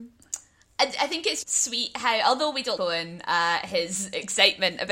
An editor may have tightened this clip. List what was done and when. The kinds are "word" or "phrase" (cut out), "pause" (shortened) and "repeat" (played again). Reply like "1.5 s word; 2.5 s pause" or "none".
1.4 s word; 2.8 s word